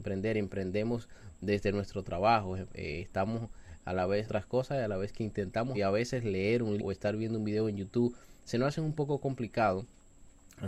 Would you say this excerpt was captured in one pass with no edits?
no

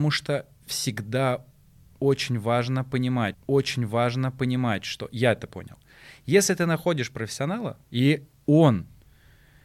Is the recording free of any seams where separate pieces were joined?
no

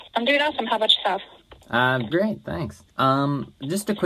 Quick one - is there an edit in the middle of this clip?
yes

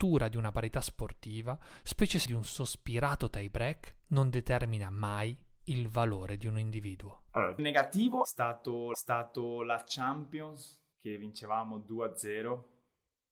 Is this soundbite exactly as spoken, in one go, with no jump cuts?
no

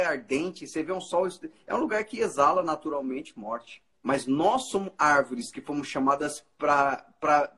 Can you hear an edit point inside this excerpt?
yes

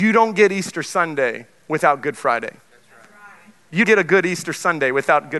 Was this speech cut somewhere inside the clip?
yes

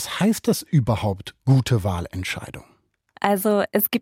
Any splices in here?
no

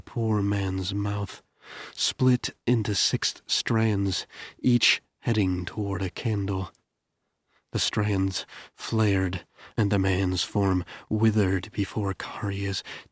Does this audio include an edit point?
no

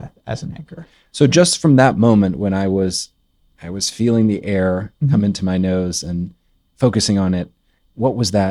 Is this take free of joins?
yes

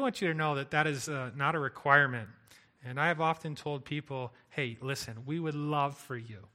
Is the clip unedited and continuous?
yes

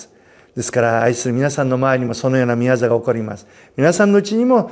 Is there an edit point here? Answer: no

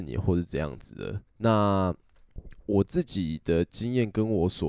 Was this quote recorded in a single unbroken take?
no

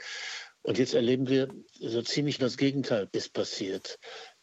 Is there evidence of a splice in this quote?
yes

